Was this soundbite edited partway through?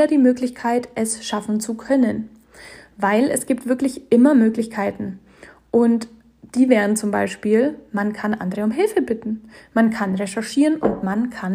no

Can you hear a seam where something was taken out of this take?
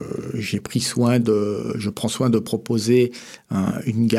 no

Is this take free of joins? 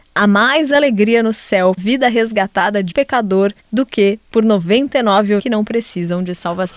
no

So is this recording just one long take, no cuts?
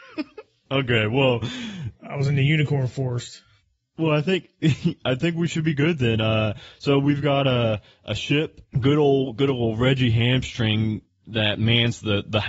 yes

